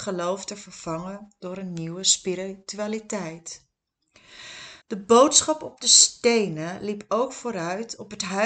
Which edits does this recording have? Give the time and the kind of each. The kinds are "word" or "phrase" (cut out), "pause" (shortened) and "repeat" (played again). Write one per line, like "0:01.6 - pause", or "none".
0:04.8 - pause